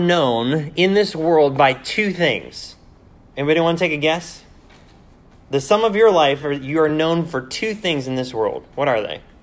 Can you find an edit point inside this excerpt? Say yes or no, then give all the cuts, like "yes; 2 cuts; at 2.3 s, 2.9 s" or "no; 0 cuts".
no; 0 cuts